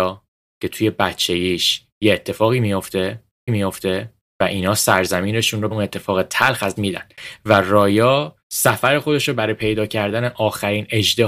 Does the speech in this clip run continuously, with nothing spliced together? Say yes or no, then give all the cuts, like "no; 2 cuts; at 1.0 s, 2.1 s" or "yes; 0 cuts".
no; 4 cuts; at 3.5 s, 5.7 s, 6.8 s, 8.4 s